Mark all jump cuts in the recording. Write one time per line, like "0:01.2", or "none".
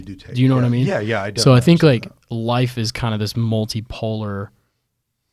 none